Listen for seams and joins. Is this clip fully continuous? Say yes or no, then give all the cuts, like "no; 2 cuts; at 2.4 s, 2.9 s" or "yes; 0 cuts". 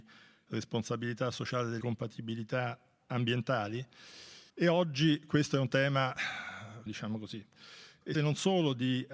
no; 4 cuts; at 1.8 s, 4.5 s, 6.9 s, 8.1 s